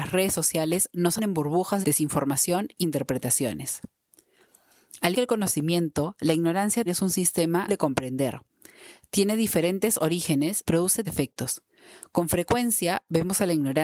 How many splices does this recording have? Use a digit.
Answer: 8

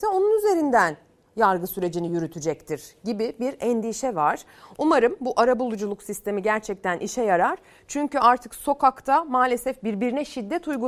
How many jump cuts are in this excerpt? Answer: 0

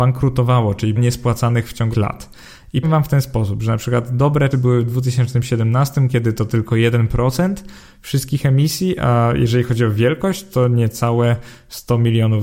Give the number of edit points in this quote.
4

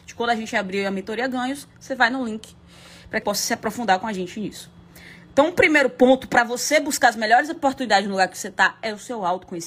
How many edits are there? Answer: 1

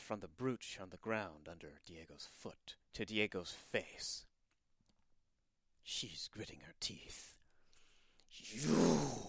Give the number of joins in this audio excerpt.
1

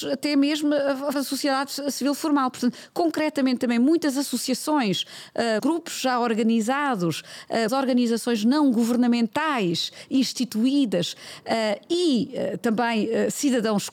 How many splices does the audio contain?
3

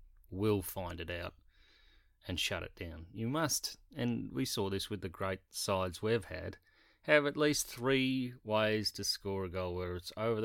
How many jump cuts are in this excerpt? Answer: 0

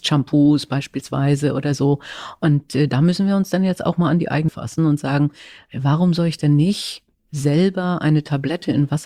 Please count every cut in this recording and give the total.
1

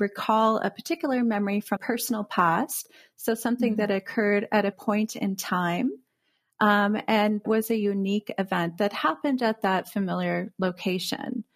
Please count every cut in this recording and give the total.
3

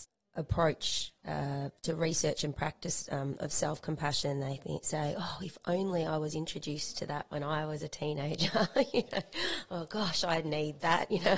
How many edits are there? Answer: 1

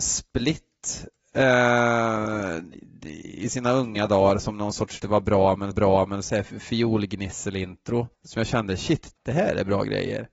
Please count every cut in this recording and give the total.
4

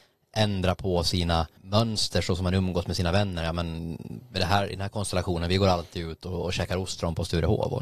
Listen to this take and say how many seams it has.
1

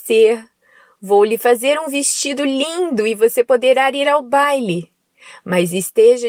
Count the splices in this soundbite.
0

